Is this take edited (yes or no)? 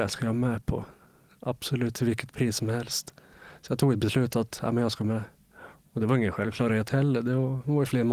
no